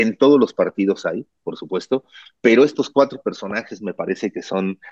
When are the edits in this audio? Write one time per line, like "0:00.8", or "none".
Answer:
none